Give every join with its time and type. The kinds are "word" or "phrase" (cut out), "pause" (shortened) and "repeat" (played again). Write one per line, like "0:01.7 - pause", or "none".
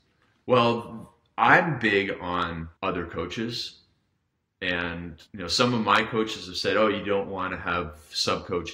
0:02.8 - pause
0:05.3 - pause